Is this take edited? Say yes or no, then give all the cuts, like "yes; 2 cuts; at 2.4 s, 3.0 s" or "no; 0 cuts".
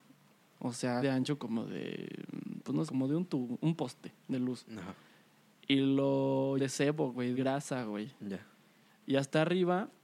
yes; 4 cuts; at 1.0 s, 2.9 s, 6.6 s, 7.3 s